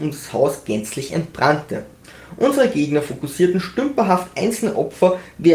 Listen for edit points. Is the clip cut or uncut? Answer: uncut